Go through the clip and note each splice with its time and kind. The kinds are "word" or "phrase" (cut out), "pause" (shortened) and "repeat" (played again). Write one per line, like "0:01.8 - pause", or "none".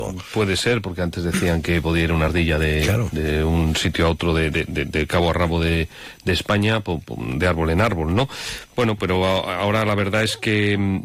none